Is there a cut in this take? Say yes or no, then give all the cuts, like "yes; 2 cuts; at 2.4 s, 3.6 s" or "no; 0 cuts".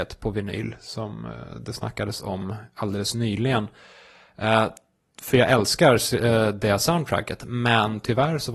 no; 0 cuts